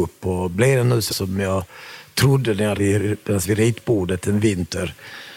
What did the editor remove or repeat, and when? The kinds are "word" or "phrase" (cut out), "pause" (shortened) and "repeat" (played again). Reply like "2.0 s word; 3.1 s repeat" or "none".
1.1 s word; 2.8 s word; 3.4 s word